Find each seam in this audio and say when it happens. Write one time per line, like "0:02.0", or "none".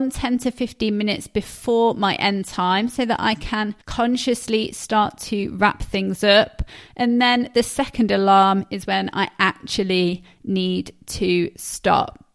0:03.8